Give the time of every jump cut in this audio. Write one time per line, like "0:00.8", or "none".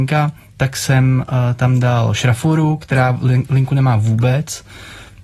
none